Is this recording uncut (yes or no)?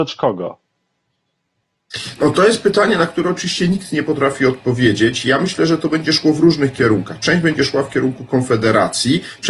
yes